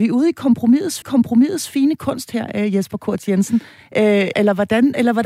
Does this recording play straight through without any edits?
no; 2 cuts; at 1.0 s, 4.3 s

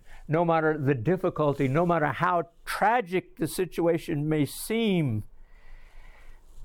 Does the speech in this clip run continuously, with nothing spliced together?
yes; 0 cuts

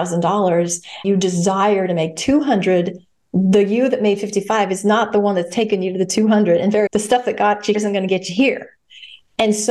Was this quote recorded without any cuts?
no; 3 cuts; at 1.0 s, 6.9 s, 7.7 s

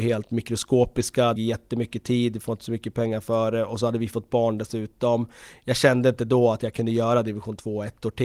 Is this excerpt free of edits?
no; 1 cut; at 1.4 s

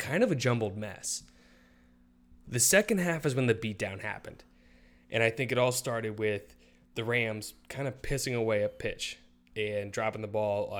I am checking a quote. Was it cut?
no; 0 cuts

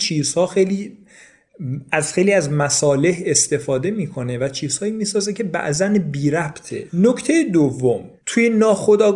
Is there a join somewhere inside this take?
no; 0 cuts

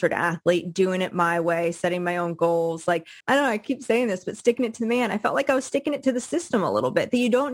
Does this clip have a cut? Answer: yes; 1 cut; at 3.2 s

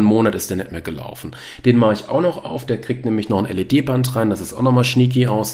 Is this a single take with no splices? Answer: yes; 0 cuts

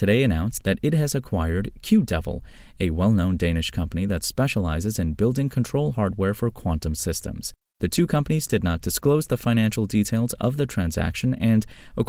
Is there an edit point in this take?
no; 0 cuts

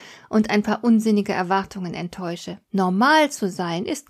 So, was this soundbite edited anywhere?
yes; 1 cut; at 2.6 s

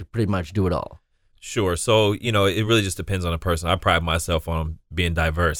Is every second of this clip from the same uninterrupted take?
yes; 0 cuts

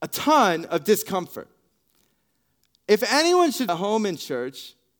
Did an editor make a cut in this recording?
yes; 1 cut; at 3.7 s

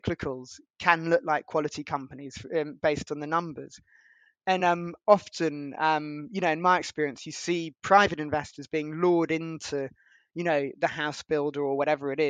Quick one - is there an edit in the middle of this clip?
no; 0 cuts

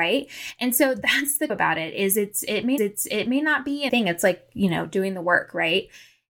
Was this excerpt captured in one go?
no; 3 cuts; at 1.5 s, 2.8 s, 3.9 s

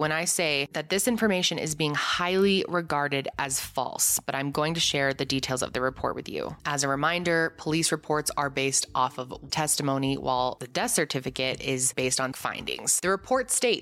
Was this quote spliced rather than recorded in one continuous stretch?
yes; 2 cuts; at 9.5 s, 12.3 s

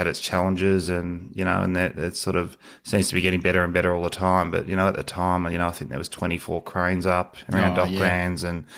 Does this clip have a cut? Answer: no; 0 cuts

